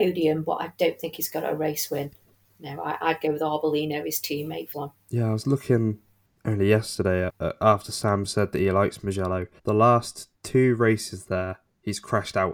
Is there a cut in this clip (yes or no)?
yes